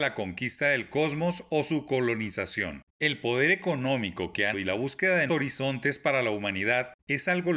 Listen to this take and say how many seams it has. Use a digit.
2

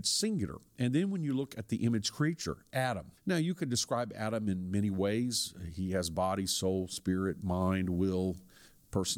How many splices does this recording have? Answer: 1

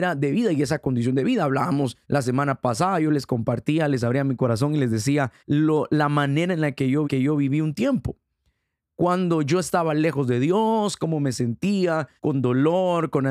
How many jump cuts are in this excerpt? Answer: 4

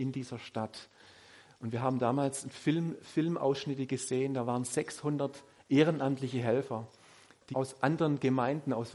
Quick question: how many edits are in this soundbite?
1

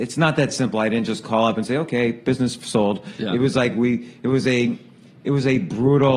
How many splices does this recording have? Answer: 0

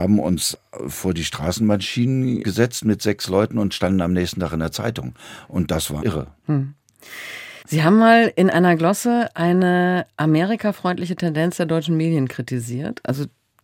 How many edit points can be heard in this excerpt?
2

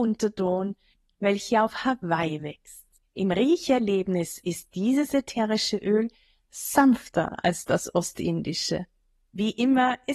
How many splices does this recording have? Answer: 1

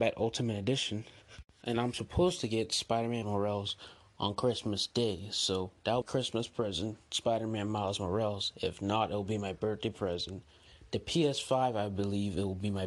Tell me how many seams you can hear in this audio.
2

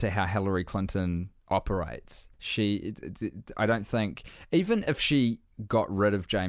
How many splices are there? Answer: 1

